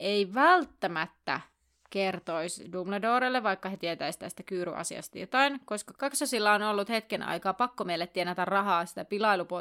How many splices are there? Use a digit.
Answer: 0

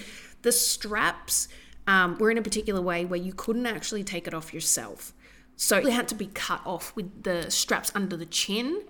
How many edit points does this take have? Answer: 1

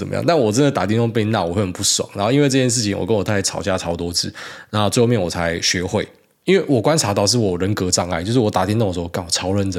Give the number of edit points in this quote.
0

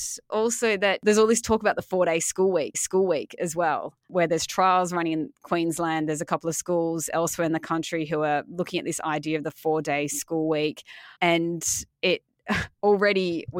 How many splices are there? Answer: 2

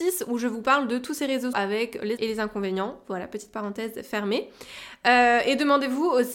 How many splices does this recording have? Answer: 2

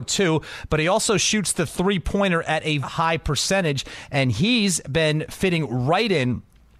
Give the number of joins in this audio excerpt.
1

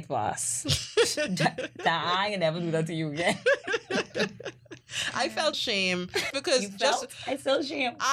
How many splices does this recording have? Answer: 2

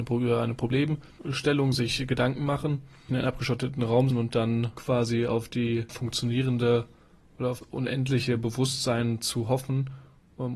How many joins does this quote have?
3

